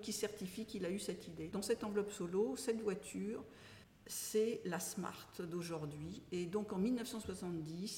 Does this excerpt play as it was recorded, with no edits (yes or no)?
no